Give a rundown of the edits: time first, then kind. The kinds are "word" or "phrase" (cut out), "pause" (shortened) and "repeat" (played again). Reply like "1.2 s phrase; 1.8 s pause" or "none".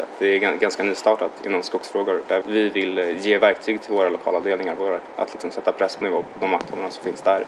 1.4 s word; 2.4 s word; 5.2 s phrase; 6.0 s word